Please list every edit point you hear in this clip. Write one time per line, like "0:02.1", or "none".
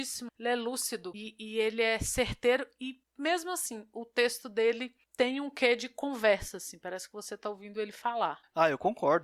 none